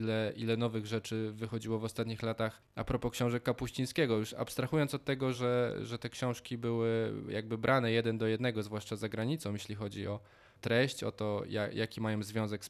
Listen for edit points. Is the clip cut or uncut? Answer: uncut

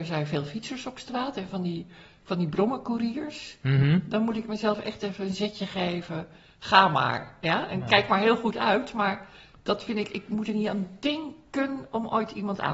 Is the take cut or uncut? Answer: uncut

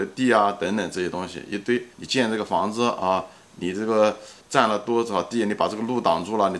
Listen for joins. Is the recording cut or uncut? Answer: cut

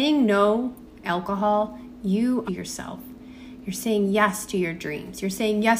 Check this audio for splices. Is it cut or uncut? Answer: cut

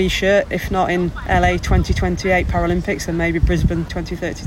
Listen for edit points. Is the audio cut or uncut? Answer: uncut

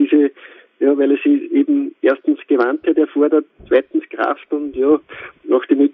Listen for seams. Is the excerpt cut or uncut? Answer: uncut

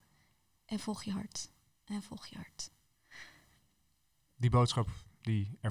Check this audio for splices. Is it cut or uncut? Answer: uncut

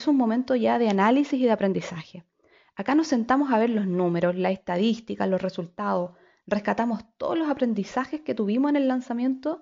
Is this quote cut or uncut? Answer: uncut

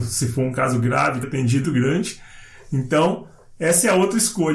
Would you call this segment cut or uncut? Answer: cut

